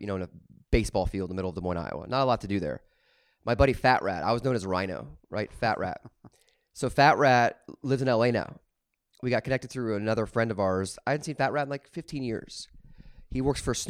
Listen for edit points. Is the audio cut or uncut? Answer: uncut